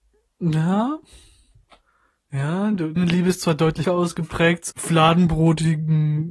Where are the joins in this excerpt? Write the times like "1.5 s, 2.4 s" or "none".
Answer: 3.0 s, 3.8 s, 4.7 s